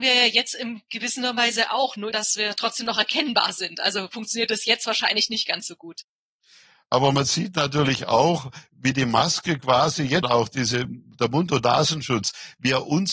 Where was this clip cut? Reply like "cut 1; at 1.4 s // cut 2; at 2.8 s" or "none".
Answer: cut 1; at 2.1 s // cut 2; at 10.2 s